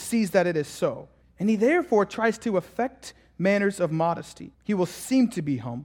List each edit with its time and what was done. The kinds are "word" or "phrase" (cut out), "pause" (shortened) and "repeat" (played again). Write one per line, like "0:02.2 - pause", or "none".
0:01.2 - pause
0:04.5 - pause